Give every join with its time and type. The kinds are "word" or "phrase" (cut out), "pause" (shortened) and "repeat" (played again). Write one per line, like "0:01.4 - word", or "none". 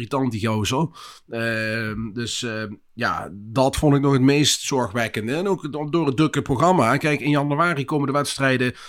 none